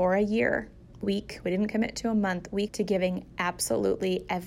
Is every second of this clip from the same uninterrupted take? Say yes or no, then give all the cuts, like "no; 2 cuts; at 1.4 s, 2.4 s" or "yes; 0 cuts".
no; 2 cuts; at 1.0 s, 2.7 s